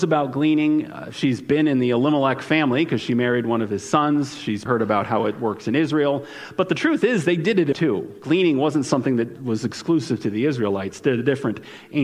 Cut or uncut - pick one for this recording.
cut